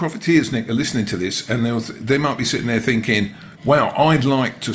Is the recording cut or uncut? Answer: cut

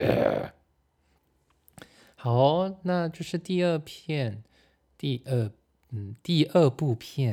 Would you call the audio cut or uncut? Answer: uncut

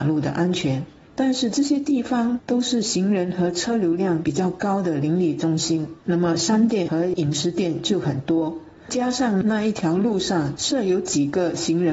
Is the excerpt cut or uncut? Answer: cut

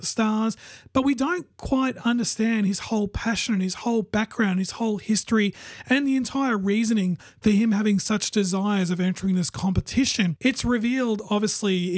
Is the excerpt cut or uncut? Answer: uncut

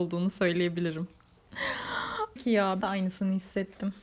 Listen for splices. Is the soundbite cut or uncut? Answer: cut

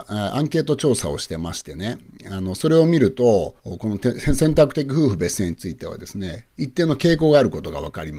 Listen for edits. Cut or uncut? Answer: cut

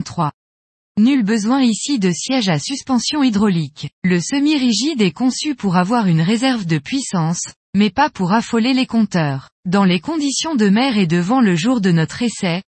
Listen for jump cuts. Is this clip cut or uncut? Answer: cut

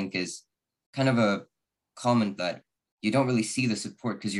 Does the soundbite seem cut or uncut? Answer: cut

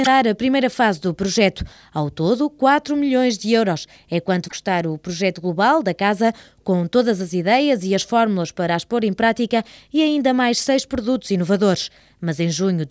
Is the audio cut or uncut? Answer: uncut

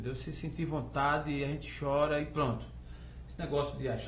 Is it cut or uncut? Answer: uncut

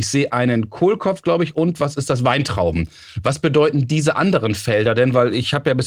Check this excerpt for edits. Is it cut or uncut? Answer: uncut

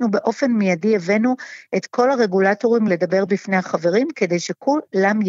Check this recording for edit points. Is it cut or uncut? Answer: uncut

